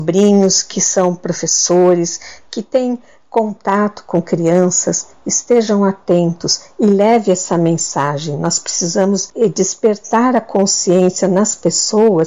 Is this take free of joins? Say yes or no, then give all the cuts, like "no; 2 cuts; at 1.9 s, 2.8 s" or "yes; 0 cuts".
yes; 0 cuts